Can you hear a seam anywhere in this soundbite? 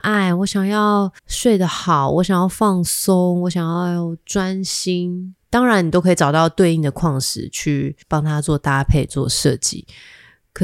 yes; 3 cuts; at 1.2 s, 5.4 s, 8.0 s

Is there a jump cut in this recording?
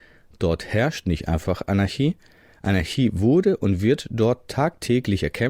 no; 0 cuts

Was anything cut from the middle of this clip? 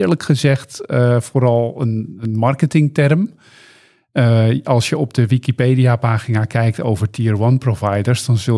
no; 0 cuts

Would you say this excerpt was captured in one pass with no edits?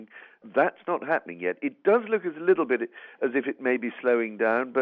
yes; 0 cuts

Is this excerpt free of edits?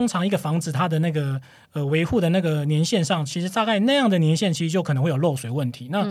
yes; 0 cuts

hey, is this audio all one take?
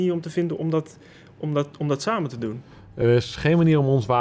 yes; 0 cuts

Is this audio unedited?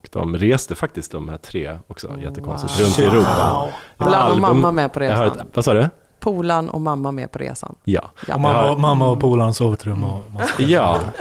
no; 4 cuts; at 1.1 s, 4.0 s, 5.4 s, 9.7 s

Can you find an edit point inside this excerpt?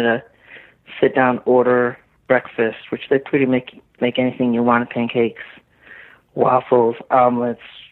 no; 0 cuts

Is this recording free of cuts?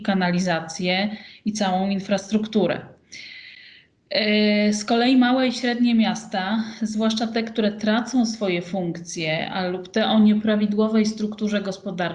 yes; 0 cuts

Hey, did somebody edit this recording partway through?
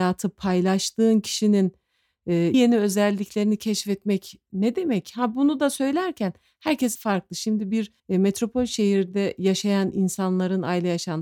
yes; 3 cuts; at 2.5 s, 6.9 s, 8.0 s

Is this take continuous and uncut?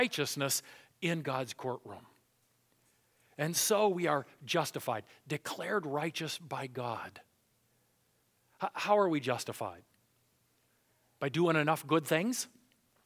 yes; 0 cuts

